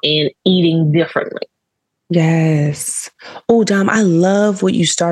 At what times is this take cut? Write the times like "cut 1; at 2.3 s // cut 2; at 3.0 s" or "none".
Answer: none